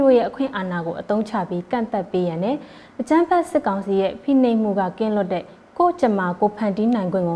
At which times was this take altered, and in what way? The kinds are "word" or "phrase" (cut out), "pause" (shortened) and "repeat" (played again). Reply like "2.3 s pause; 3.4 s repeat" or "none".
none